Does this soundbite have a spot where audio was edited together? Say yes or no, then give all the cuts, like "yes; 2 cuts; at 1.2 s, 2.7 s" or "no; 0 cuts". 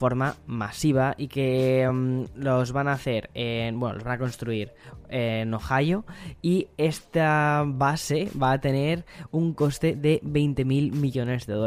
no; 0 cuts